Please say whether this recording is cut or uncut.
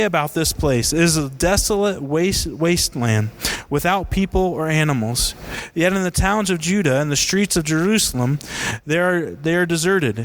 uncut